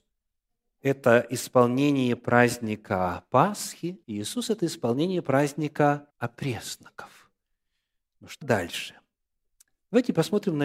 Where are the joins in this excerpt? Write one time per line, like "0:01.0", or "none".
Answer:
0:04.0
0:06.1
0:08.4